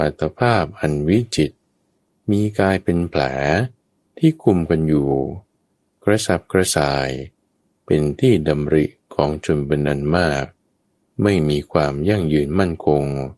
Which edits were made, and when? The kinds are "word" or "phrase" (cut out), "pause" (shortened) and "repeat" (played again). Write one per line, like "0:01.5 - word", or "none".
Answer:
none